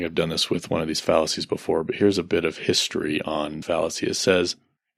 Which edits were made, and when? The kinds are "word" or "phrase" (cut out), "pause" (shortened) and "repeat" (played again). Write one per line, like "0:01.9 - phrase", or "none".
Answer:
0:03.6 - word